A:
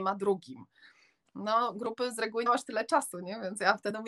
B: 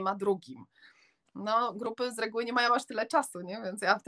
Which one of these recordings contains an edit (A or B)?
A